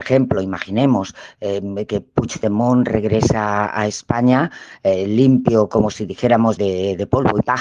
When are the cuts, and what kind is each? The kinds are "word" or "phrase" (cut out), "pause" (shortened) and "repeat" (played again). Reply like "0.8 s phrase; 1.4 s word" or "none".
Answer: 6.6 s word